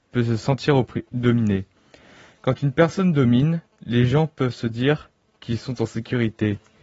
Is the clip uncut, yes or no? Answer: yes